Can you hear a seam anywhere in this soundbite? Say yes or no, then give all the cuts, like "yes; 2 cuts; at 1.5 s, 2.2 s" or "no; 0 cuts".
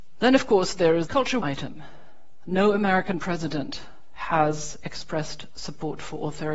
yes; 2 cuts; at 1.1 s, 1.4 s